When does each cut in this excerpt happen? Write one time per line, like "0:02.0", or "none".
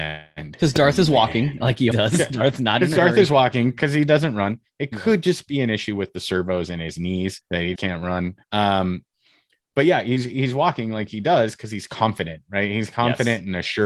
0:01.9
0:07.4
0:07.8
0:08.4

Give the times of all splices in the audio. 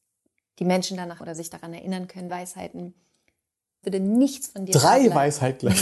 0:01.2
0:02.3
0:03.8

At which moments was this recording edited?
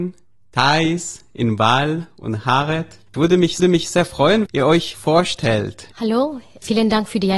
0:03.6
0:04.5
0:04.9
0:05.9

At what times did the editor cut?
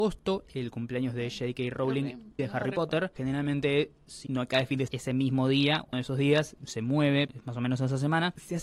0:02.4
0:04.3
0:04.9
0:05.9
0:06.6
0:07.3

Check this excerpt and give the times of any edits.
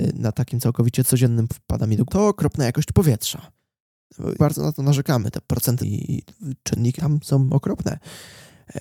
0:01.5
0:02.1
0:04.4
0:05.8
0:07.0

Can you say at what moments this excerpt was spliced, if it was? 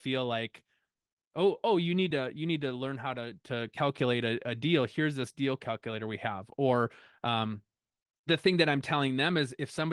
none

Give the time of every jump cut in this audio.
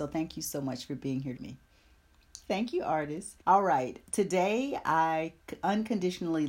0:01.4
0:02.4
0:03.4
0:04.1

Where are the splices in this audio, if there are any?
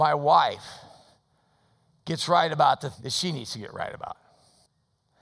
0:02.9

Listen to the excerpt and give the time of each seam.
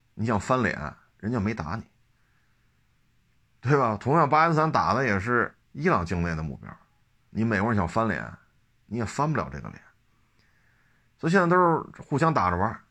0:05.6

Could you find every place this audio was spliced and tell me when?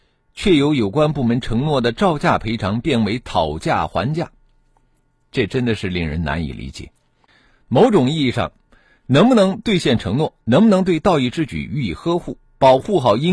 none

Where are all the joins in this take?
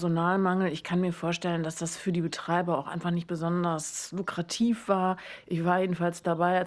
none

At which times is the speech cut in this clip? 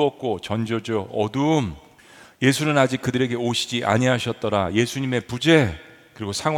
0:02.0

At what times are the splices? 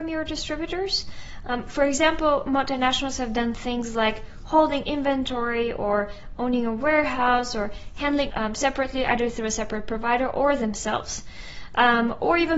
0:08.3

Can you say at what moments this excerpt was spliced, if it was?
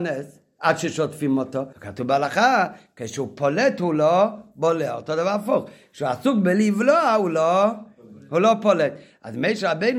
0:01.7

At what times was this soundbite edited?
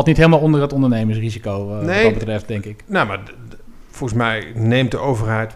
none

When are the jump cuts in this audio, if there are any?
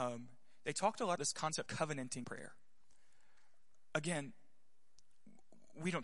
0:01.2
0:01.7
0:02.2

